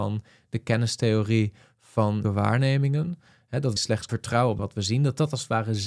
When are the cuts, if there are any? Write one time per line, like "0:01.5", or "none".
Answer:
0:02.2
0:03.8
0:04.1
0:04.6

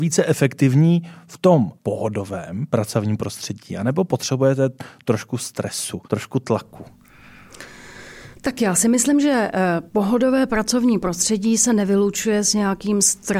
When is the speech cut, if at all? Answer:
0:01.8
0:06.0
0:08.3
0:09.9

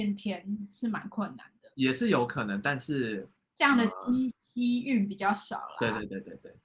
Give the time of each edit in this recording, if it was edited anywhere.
0:01.7
0:03.4

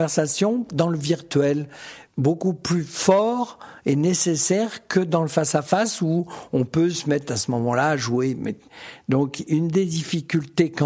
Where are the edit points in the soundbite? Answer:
0:02.1
0:09.5

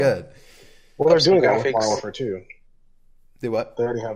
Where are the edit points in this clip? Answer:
none

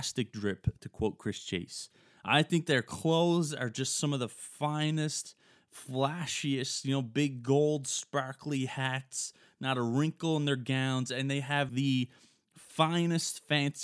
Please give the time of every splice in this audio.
0:11.7

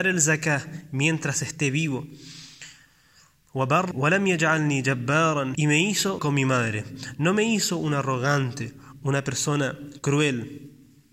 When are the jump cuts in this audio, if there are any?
0:03.9
0:05.5
0:06.2

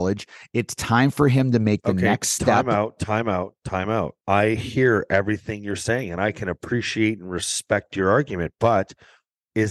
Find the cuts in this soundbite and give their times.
0:04.2

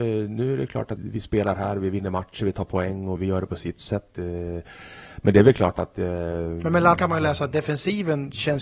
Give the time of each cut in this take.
0:01.0
0:03.2
0:07.0

